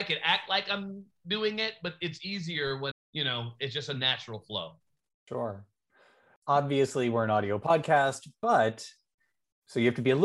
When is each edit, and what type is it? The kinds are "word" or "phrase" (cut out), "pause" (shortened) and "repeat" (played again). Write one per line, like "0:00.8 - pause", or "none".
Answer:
0:02.9 - word